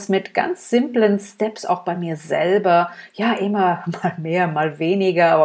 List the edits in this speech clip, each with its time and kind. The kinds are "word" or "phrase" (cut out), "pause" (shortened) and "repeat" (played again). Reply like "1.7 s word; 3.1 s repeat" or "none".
none